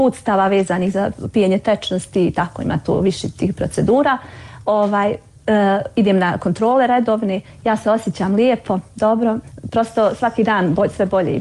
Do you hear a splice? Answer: no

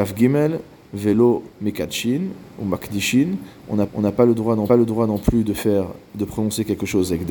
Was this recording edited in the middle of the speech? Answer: yes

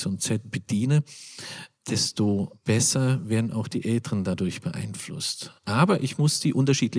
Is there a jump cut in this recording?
yes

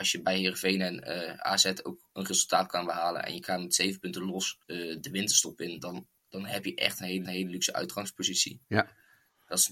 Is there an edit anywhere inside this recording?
yes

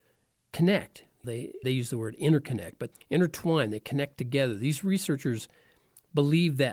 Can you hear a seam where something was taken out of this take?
yes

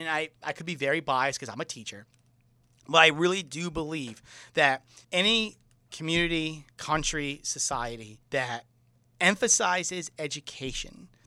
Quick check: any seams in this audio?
yes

